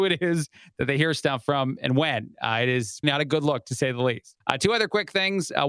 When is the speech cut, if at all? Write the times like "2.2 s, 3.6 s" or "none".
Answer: 3.0 s, 4.4 s